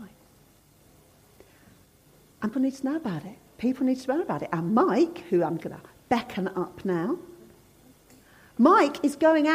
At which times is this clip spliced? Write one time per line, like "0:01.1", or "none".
0:02.5
0:05.6